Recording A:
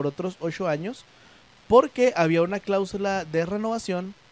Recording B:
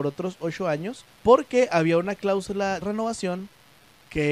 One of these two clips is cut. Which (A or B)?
B